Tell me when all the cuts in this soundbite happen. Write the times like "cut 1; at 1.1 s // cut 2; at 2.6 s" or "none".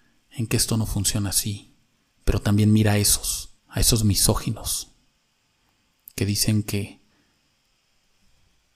cut 1; at 2.0 s // cut 2; at 3.6 s